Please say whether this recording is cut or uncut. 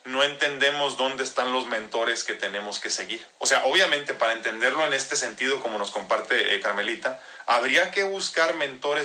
cut